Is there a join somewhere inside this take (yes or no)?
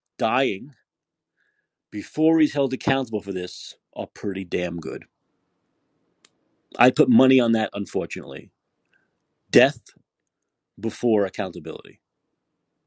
no